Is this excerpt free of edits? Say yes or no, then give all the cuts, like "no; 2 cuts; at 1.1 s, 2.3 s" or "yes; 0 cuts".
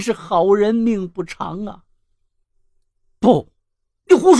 yes; 0 cuts